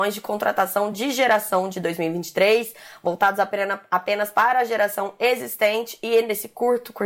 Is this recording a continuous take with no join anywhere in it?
yes; 0 cuts

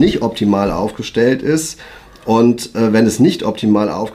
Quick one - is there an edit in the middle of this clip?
no; 0 cuts

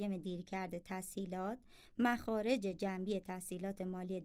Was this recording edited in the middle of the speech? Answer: no; 0 cuts

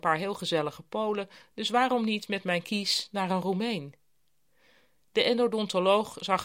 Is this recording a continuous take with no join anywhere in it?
yes; 0 cuts

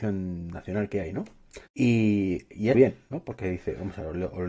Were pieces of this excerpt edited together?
yes; 2 cuts; at 1.7 s, 2.7 s

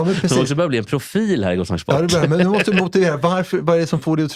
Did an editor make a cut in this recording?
no; 0 cuts

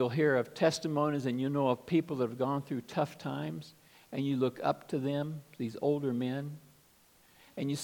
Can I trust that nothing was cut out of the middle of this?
yes; 0 cuts

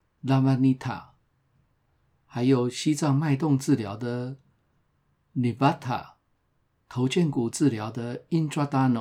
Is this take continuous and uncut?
yes; 0 cuts

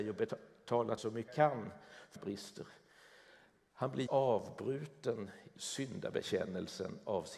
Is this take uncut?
no; 5 cuts; at 1.0 s, 1.3 s, 2.2 s, 4.1 s, 5.6 s

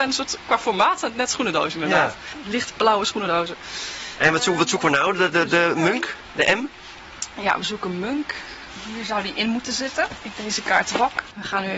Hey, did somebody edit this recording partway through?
no; 0 cuts

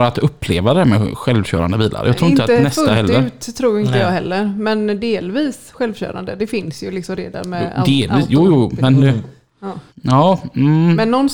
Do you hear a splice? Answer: yes; 1 cut; at 9.9 s

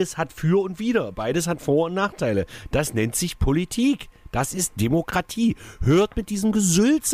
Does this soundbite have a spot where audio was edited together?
no; 0 cuts

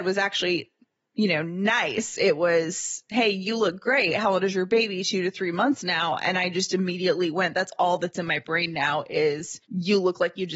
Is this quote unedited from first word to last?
no; 1 cut; at 9.6 s

